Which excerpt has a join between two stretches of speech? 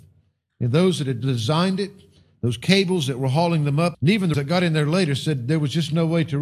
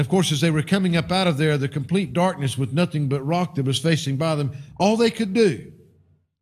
first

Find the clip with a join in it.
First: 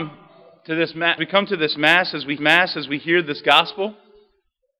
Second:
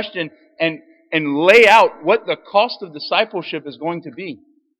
first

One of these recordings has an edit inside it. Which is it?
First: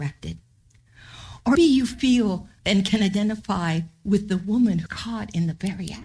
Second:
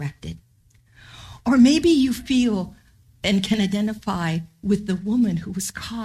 first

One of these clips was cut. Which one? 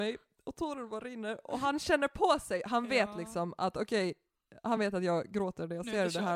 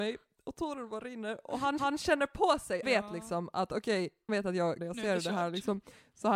second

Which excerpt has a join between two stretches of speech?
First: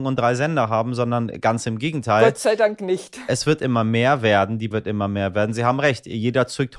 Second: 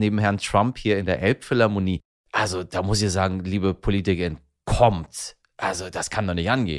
first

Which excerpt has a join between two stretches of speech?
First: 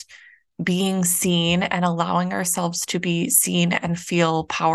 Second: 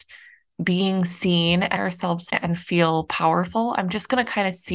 second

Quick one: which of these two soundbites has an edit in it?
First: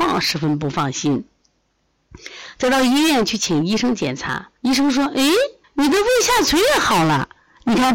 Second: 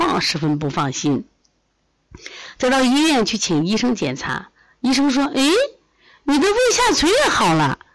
first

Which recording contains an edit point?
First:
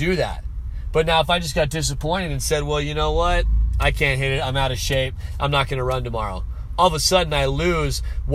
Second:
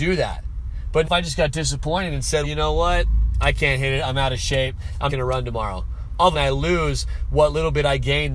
second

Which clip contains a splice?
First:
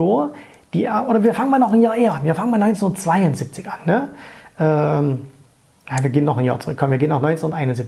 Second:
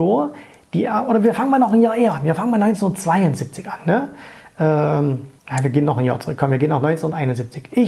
second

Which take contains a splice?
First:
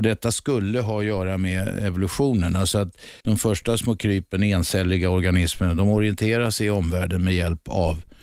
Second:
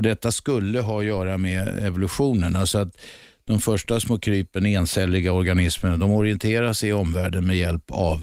first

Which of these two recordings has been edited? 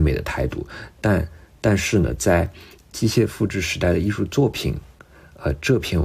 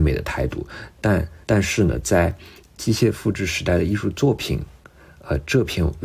second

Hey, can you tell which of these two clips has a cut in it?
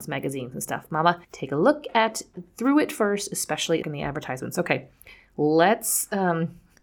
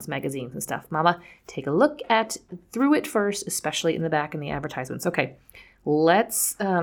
first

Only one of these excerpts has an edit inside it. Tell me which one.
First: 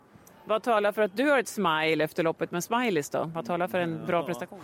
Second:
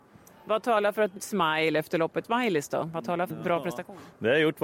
second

